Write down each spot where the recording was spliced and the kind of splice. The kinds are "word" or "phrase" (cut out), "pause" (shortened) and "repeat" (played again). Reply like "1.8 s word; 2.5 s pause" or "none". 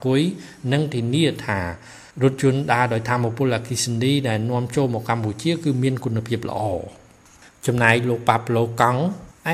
none